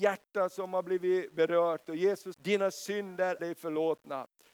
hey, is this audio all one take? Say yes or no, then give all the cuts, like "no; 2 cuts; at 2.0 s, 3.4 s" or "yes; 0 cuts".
no; 2 cuts; at 2.3 s, 3.4 s